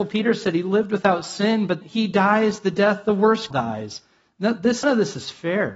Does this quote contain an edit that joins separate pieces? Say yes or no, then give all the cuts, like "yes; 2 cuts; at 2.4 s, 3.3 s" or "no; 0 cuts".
yes; 3 cuts; at 1.8 s, 3.5 s, 4.8 s